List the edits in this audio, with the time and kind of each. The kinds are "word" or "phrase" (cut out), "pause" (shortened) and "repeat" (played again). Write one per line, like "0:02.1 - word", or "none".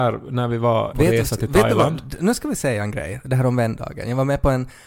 0:00.9 - phrase